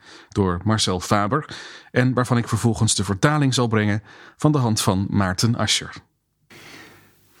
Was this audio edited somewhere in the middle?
no; 0 cuts

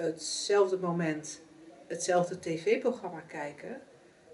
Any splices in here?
no; 0 cuts

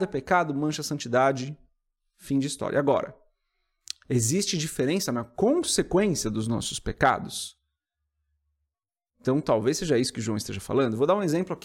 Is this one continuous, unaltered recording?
yes; 0 cuts

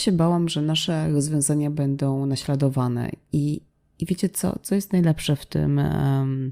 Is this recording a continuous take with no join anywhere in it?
yes; 0 cuts

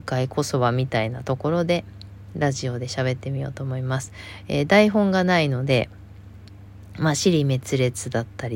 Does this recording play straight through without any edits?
yes; 0 cuts

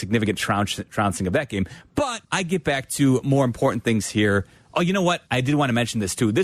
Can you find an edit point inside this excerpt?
yes; 2 cuts; at 2.2 s, 5.3 s

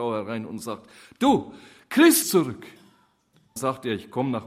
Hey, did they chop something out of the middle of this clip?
yes; 2 cuts; at 2.2 s, 3.6 s

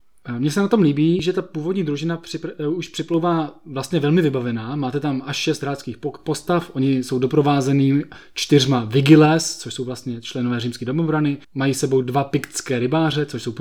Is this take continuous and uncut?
no; 1 cut; at 11.4 s

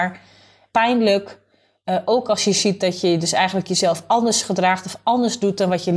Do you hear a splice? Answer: no; 0 cuts

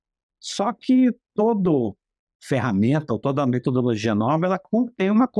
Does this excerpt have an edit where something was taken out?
no; 0 cuts

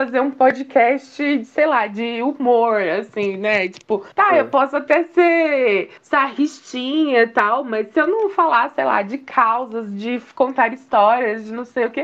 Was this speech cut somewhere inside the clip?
yes; 2 cuts; at 4.1 s, 6.0 s

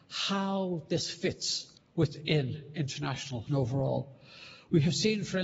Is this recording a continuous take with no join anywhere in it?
no; 2 cuts; at 1.7 s, 3.5 s

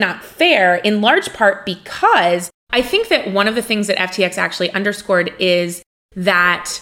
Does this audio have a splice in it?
no; 0 cuts

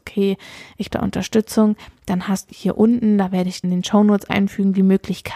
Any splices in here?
yes; 4 cuts; at 0.9 s, 2.5 s, 3.6 s, 4.3 s

